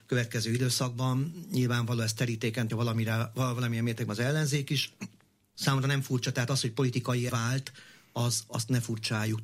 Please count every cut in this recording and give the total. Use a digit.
3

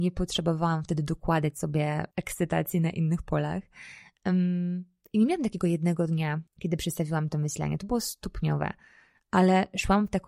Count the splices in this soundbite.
3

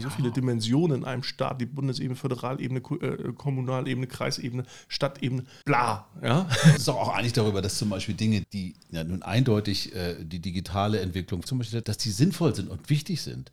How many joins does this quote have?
5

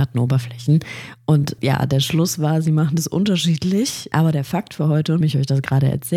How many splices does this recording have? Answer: 2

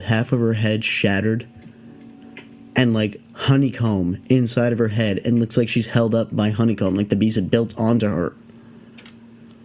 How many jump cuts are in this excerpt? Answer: 0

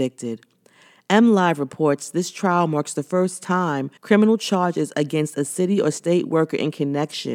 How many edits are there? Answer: 1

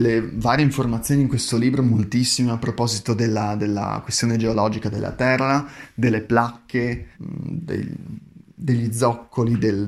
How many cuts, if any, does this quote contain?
1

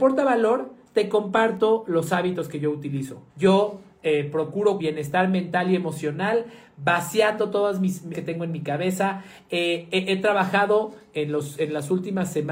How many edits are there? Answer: 3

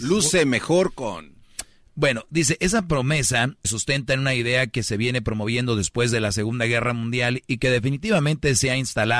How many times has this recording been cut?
1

